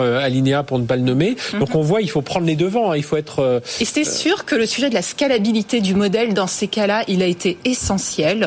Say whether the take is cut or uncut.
uncut